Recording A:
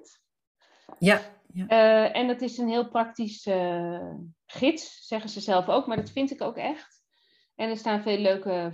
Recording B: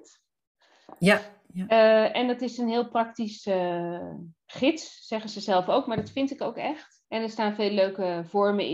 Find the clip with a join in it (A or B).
B